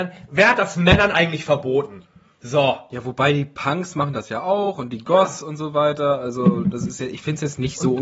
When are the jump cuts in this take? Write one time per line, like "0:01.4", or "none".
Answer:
none

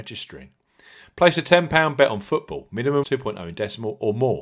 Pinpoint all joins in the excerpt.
0:03.0

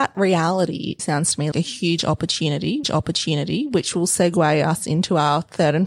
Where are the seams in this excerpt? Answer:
0:01.0
0:01.5
0:02.8

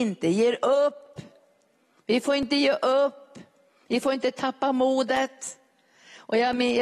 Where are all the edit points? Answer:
none

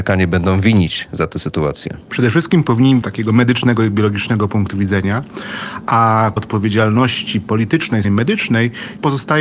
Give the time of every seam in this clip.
0:03.0
0:06.4
0:08.0

